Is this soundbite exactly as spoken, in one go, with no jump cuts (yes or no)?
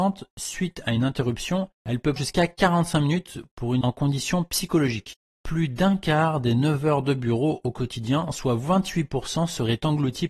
no